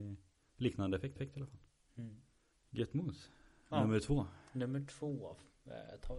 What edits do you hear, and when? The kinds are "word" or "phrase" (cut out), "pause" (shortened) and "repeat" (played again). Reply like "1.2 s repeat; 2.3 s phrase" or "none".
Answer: 1.2 s repeat; 2.5 s pause